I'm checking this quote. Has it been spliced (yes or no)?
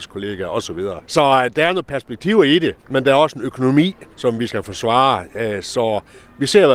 yes